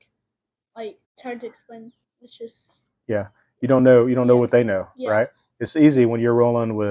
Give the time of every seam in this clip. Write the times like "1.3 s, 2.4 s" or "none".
1.0 s, 2.0 s